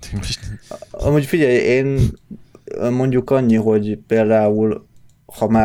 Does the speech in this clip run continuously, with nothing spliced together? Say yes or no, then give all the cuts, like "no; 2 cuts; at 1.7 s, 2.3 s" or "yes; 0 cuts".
yes; 0 cuts